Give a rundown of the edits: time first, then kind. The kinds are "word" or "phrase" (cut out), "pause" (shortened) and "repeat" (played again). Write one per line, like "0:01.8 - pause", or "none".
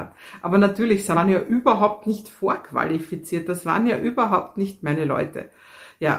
0:01.1 - phrase